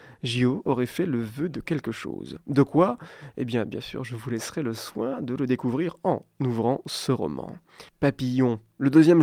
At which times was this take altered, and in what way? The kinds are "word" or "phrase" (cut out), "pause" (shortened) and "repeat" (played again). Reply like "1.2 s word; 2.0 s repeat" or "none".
6.3 s pause; 7.9 s pause